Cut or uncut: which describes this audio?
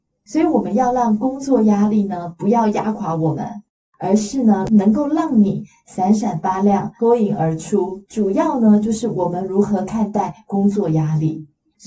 cut